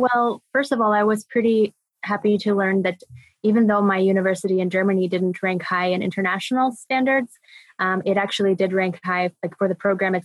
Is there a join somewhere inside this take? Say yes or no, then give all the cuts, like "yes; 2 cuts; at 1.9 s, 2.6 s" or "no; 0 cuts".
no; 0 cuts